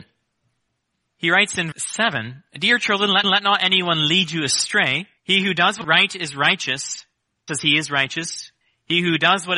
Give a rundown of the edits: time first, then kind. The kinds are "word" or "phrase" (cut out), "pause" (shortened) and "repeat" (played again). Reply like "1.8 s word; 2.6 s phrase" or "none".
1.7 s word; 3.2 s repeat; 5.2 s pause; 5.8 s word; 7.5 s word; 8.6 s pause